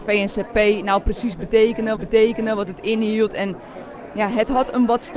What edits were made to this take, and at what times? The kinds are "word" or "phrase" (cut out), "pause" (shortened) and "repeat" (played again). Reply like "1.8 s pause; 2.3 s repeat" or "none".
2.0 s repeat